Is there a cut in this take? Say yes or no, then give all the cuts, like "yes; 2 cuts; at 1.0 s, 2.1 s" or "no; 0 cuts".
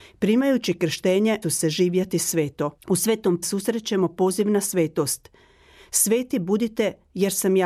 yes; 3 cuts; at 1.4 s, 2.8 s, 3.4 s